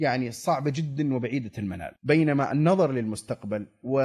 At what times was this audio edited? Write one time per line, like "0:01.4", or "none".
0:02.0

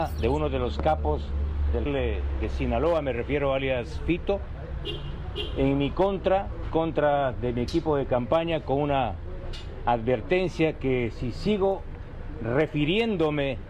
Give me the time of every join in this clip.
0:01.9
0:06.7

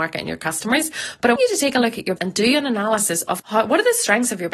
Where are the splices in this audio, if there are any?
0:01.4
0:02.2
0:03.4

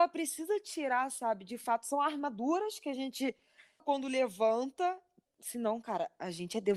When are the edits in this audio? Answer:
0:03.8
0:05.3

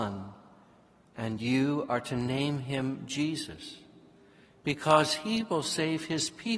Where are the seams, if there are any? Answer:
none

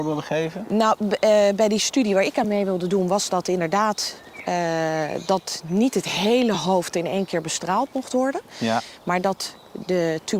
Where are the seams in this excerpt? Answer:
none

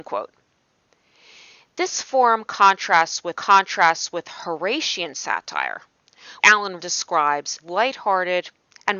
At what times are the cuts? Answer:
0:03.3
0:06.4
0:06.8
0:07.6

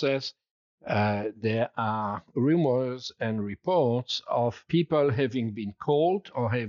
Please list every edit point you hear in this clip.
none

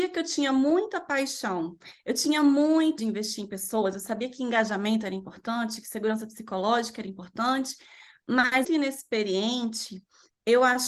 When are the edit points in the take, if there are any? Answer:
0:03.0
0:08.6

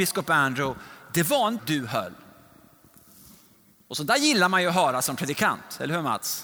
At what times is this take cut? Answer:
0:01.6

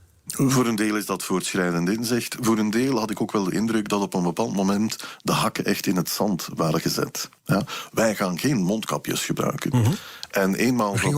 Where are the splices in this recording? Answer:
0:07.4

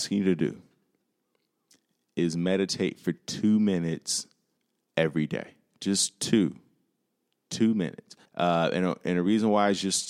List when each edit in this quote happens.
0:04.6
0:08.3

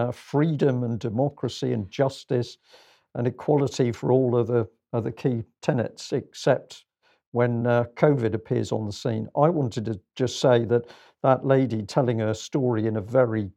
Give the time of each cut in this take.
none

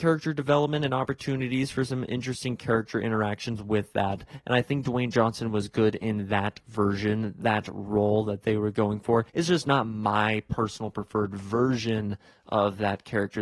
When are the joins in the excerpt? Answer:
0:09.3

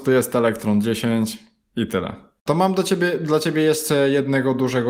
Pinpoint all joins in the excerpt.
none

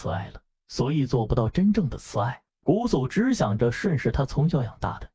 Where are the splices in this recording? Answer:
none

